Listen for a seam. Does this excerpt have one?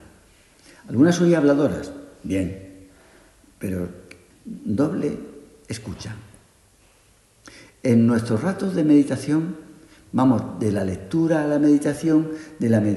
no; 0 cuts

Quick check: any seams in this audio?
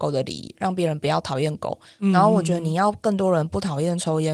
no; 0 cuts

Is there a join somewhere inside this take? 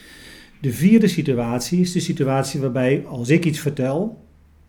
no; 0 cuts

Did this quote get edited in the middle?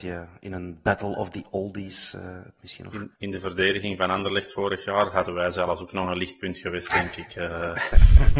yes; 1 cut; at 3.2 s

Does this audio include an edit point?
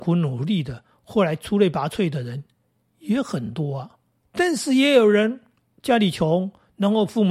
no; 0 cuts

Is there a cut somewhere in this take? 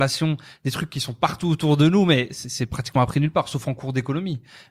no; 0 cuts

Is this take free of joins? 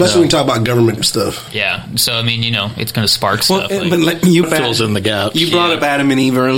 no; 2 cuts; at 1.0 s, 4.4 s

